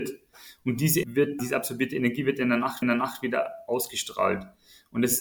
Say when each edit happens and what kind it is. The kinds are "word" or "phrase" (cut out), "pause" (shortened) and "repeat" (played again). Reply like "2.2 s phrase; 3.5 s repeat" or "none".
1.0 s word; 1.4 s phrase; 2.8 s repeat